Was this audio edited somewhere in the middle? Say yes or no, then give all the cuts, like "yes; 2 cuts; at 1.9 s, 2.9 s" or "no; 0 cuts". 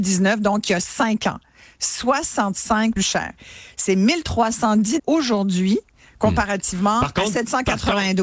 yes; 2 cuts; at 3.0 s, 5.0 s